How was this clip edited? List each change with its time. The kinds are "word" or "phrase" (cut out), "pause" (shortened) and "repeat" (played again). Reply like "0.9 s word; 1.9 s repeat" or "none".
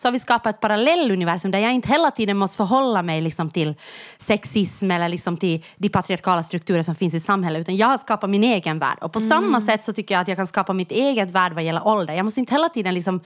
none